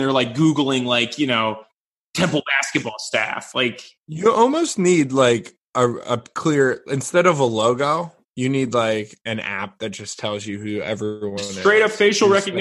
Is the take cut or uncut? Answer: uncut